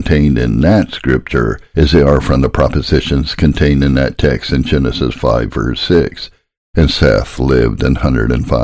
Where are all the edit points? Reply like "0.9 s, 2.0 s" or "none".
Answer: none